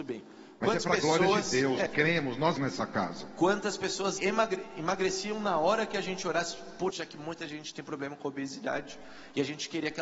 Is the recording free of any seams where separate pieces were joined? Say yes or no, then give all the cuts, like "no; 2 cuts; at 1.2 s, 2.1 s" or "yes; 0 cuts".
no; 4 cuts; at 1.9 s, 2.6 s, 4.2 s, 6.9 s